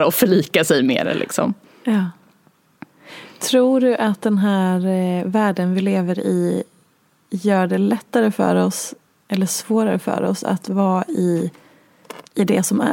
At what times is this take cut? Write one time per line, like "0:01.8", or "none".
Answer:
none

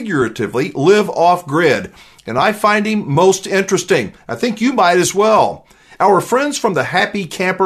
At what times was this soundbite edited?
none

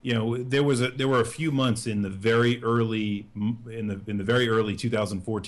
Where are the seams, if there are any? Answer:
none

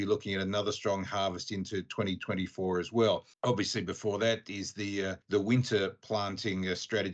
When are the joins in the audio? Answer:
0:03.3
0:05.2

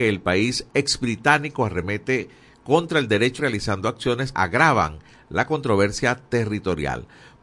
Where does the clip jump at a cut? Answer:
0:03.4
0:04.3

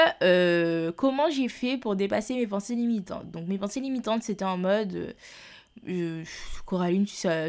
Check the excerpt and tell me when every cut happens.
none

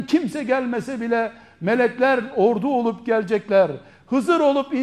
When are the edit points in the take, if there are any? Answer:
none

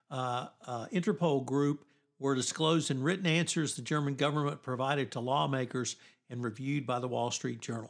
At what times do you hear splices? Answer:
none

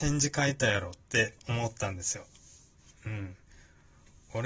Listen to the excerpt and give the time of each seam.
0:01.0
0:03.0

